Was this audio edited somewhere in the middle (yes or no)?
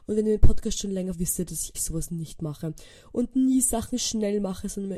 yes